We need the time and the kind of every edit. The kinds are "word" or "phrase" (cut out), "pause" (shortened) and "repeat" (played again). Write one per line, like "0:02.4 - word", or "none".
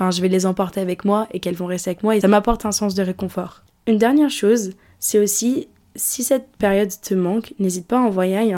0:02.2 - word

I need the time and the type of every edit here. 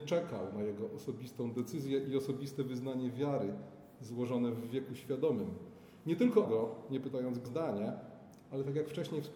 0:06.4 - word
0:07.5 - word

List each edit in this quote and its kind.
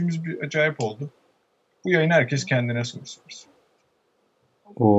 none

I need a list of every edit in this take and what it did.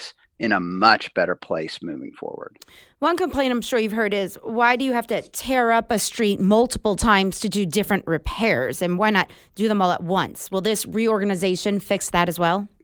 none

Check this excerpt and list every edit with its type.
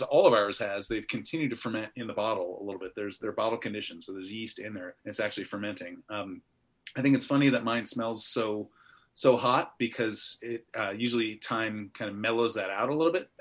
0:05.0 - pause

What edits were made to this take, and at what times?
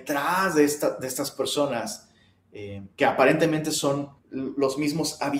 0:02.9 - pause
0:04.2 - pause

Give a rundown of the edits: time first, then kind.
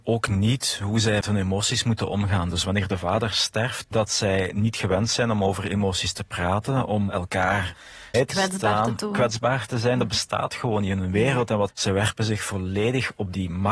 0:01.2 - word
0:03.9 - phrase
0:08.1 - phrase
0:11.7 - phrase

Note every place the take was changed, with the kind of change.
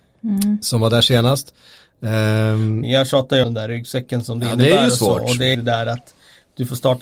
0:02.8 - phrase
0:03.4 - word
0:05.5 - word

